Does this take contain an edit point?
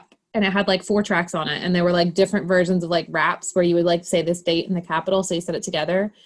no; 0 cuts

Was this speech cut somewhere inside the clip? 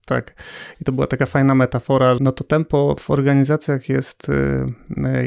yes; 1 cut; at 2.2 s

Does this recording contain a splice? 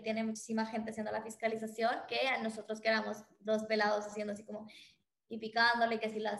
no; 0 cuts

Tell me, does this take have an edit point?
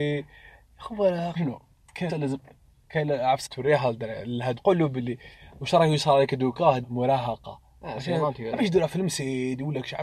yes; 5 cuts; at 1.4 s, 2.1 s, 3.5 s, 4.6 s, 6.8 s

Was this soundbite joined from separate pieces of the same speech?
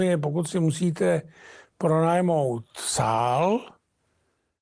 no; 0 cuts

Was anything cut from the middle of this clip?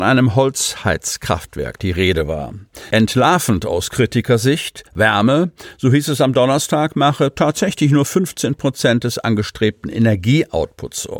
yes; 1 cut; at 4.9 s

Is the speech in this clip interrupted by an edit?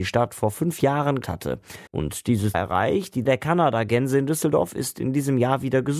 yes; 4 cuts; at 1.2 s, 1.9 s, 2.5 s, 3.3 s

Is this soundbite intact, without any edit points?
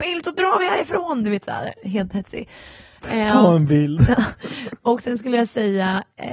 yes; 0 cuts

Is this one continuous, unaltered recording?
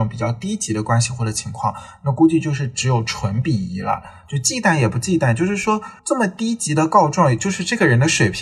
no; 1 cut; at 6.0 s

